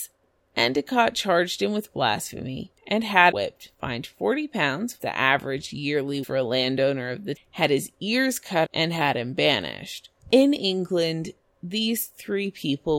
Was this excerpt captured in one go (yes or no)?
no